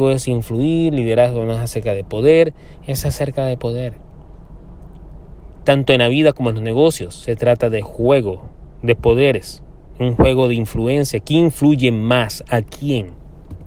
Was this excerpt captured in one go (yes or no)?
yes